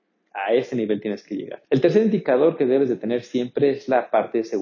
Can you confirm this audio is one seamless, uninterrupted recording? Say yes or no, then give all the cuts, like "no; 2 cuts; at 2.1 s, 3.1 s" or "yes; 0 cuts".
no; 1 cut; at 1.6 s